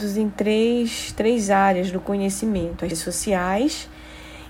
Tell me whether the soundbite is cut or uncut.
cut